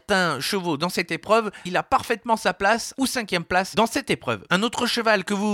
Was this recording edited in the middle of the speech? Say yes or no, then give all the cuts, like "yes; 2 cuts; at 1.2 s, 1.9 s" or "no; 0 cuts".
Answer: yes; 2 cuts; at 1.7 s, 3.0 s